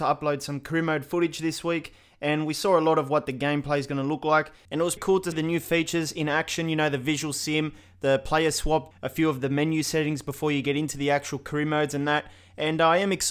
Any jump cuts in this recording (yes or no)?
yes